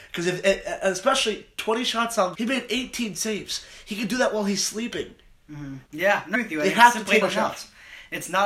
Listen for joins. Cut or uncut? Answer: cut